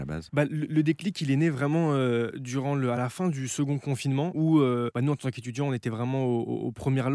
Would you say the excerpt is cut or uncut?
uncut